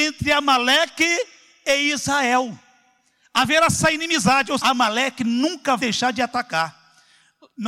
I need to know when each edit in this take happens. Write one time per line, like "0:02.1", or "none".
0:03.7
0:04.6
0:05.8